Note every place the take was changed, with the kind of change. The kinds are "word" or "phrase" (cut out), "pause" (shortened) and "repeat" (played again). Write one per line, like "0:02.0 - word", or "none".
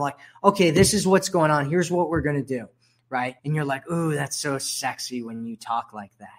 0:03.4 - pause